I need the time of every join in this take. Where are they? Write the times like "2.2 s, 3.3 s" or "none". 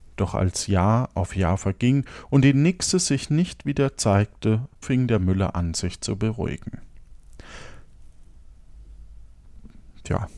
4.8 s